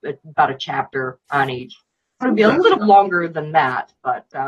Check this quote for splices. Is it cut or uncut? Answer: cut